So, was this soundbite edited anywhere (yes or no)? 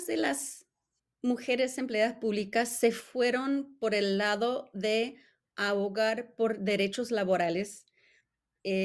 yes